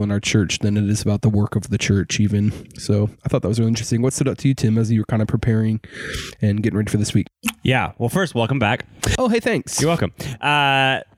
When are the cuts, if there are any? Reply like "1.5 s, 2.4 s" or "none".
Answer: none